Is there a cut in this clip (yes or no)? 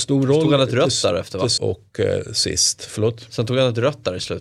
yes